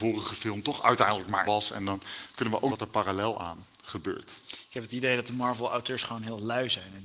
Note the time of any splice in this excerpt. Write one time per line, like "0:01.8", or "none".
0:01.4
0:02.7